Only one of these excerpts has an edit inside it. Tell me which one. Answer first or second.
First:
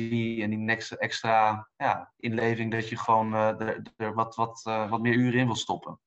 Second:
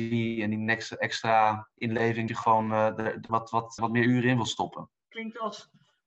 second